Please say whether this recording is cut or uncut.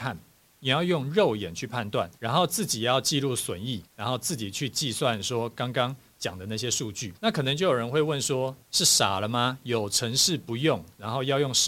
cut